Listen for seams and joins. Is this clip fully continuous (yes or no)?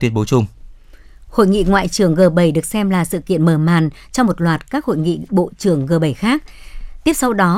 yes